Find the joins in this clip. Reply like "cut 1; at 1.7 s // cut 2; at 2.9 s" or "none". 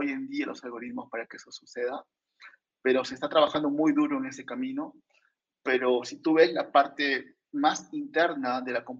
none